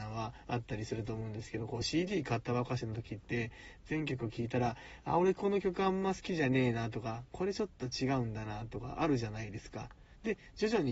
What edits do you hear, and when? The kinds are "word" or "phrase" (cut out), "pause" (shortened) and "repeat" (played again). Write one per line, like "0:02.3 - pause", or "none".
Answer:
none